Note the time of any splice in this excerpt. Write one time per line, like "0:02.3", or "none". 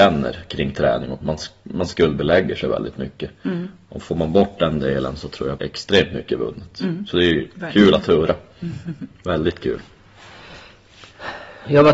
0:01.2
0:05.6